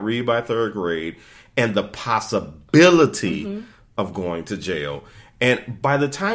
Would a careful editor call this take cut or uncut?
uncut